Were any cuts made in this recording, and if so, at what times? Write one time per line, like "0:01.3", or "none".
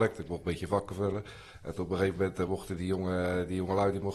none